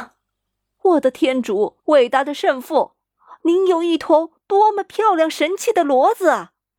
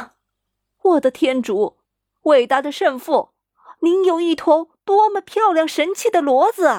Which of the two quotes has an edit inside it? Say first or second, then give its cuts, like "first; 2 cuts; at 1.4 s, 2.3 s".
first; 1 cut; at 1.8 s